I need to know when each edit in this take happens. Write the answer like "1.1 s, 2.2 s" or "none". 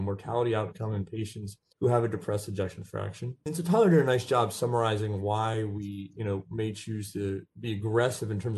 1.7 s, 3.4 s

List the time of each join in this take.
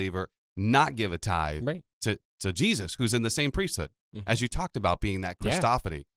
none

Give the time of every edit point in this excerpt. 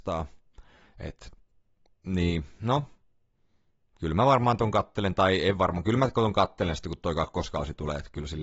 none

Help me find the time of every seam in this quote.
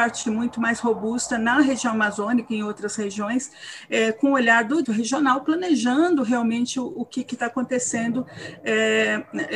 4.8 s

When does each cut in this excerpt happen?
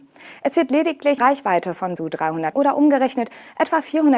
1.2 s, 2.0 s, 2.5 s

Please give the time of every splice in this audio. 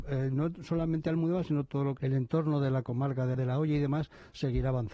2.0 s, 3.3 s

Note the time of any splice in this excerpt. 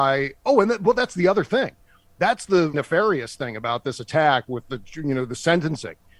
2.7 s

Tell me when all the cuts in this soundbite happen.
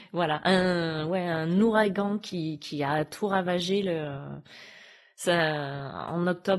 none

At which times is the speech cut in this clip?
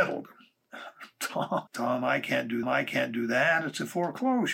1.7 s, 2.6 s

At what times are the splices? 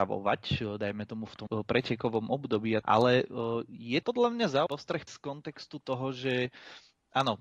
1.5 s, 2.8 s, 4.0 s, 4.7 s, 5.1 s

